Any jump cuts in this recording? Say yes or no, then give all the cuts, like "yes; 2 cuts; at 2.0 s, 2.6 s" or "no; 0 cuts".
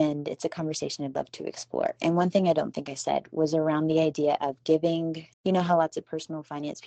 yes; 1 cut; at 5.3 s